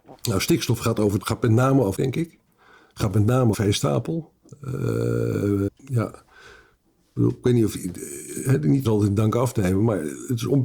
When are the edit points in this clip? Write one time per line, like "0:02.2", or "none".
0:01.2
0:01.9
0:03.5
0:05.7
0:08.8

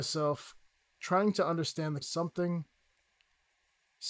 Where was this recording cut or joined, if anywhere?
0:02.0

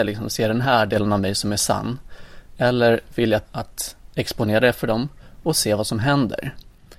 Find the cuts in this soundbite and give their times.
0:03.4

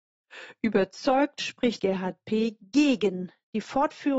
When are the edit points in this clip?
0:01.8

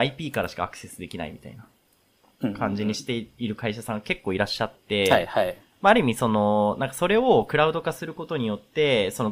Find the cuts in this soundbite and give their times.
none

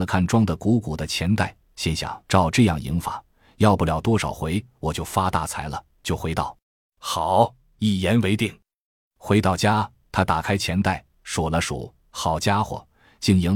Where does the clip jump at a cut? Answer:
0:02.3
0:06.6

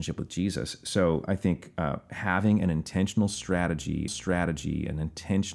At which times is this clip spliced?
0:04.1

